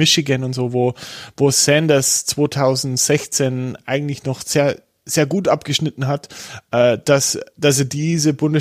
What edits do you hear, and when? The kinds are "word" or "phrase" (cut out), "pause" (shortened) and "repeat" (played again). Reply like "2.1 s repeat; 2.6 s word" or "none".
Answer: none